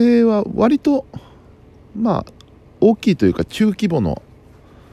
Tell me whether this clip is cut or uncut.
uncut